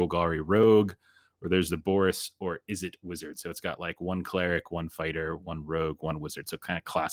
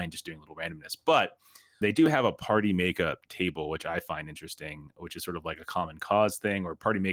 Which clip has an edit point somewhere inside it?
second; 1 cut; at 1.8 s

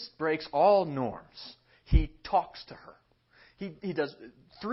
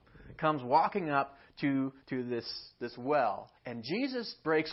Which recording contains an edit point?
second; 2 cuts; at 2.0 s, 3.6 s

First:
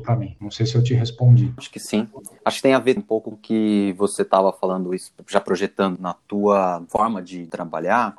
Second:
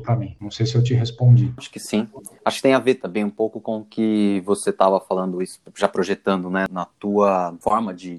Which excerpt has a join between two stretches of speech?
first; 3 cuts; at 3.0 s, 3.3 s, 6.0 s

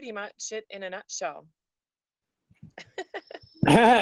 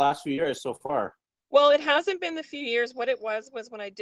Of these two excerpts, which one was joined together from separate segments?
second; 1 cut; at 1.3 s

